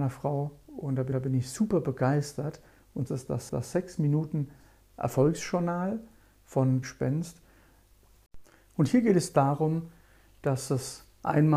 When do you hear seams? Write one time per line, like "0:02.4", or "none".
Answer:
0:01.1
0:03.1
0:03.5
0:06.8